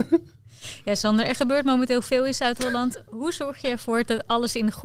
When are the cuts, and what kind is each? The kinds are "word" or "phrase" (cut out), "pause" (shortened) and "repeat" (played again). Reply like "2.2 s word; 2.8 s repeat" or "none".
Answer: none